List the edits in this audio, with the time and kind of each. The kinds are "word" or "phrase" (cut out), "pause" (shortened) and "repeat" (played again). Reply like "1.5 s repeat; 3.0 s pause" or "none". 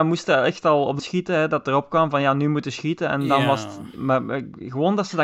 1.0 s word